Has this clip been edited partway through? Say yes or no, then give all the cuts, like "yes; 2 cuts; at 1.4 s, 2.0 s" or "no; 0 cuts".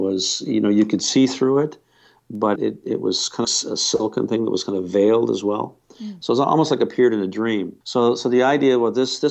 yes; 3 cuts; at 2.6 s, 3.4 s, 7.8 s